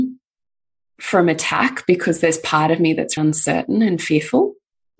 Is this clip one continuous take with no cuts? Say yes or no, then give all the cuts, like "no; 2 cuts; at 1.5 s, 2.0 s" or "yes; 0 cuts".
no; 1 cut; at 3.2 s